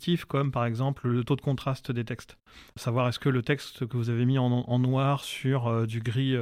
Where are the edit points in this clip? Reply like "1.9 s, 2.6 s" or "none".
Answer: 2.7 s